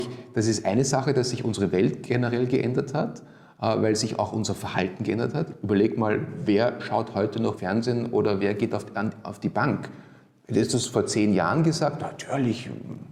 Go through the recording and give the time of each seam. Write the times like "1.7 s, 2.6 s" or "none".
7.6 s